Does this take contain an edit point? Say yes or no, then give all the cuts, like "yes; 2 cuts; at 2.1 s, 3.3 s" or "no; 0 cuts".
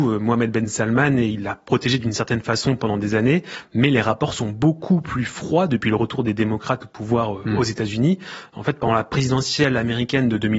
no; 0 cuts